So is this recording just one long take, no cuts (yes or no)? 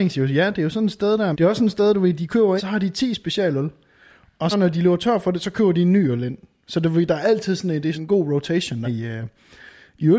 no